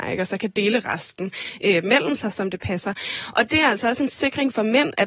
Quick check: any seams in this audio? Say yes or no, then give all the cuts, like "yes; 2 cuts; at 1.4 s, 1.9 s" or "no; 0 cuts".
no; 0 cuts